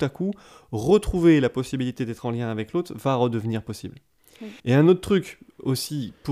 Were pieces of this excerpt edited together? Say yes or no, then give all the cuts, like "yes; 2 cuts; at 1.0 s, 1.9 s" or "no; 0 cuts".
yes; 1 cut; at 4.6 s